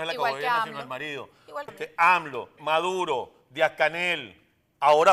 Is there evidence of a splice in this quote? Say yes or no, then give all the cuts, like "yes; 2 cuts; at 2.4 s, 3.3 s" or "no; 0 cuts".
yes; 2 cuts; at 1.7 s, 2.6 s